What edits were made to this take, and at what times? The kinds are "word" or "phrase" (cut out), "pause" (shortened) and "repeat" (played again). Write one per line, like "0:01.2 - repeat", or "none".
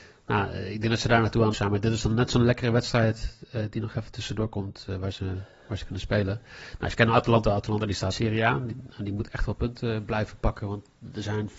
0:01.5 - word
0:08.1 - phrase